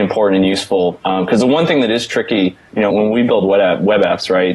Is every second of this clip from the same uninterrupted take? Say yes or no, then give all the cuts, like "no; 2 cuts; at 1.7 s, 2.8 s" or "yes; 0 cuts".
no; 1 cut; at 2.9 s